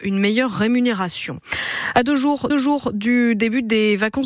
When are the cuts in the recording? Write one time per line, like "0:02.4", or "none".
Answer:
0:02.5